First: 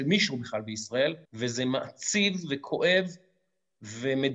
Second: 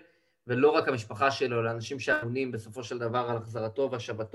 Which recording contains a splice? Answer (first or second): first